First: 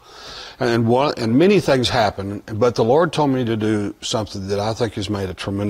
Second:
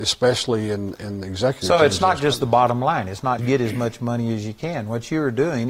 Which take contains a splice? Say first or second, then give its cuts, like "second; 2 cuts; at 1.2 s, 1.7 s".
second; 1 cut; at 3.4 s